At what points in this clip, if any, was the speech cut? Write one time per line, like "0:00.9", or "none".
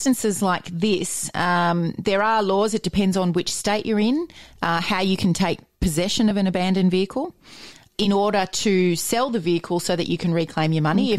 none